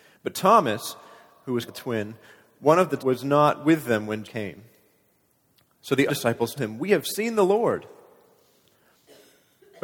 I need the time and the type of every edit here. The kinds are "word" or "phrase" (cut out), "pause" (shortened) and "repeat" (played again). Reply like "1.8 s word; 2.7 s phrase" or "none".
1.7 s word; 3.0 s word; 4.2 s word; 6.1 s word; 6.6 s word